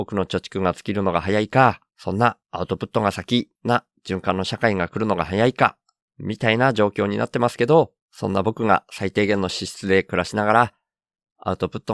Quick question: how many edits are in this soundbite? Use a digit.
5